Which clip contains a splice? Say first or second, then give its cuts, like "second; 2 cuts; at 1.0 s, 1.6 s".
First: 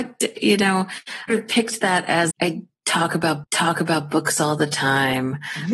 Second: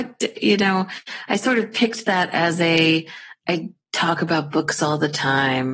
first; 3 cuts; at 1.3 s, 2.3 s, 3.4 s